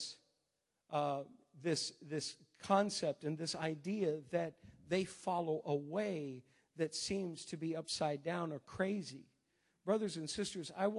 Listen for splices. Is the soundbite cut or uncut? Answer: uncut